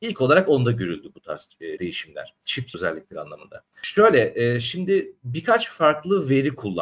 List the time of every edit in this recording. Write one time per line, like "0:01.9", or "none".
0:01.8
0:02.7